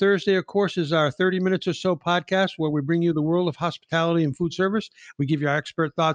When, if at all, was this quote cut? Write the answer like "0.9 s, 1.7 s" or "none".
none

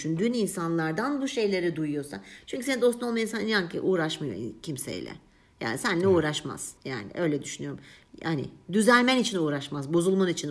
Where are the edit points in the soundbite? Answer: 6.8 s

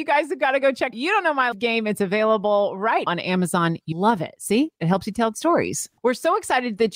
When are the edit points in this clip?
0.9 s, 1.5 s, 3.1 s, 3.9 s, 5.3 s

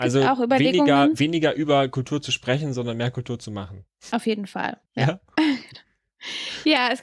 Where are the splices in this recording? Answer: 4.8 s

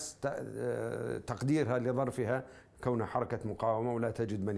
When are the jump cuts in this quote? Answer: none

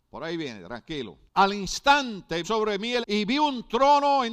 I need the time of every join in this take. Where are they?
1.3 s, 2.4 s, 3.0 s

